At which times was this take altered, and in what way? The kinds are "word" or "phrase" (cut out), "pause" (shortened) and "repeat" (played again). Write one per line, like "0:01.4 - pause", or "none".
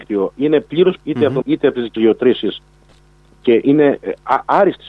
0:01.0 - word
0:01.4 - word
0:02.0 - word
0:03.6 - word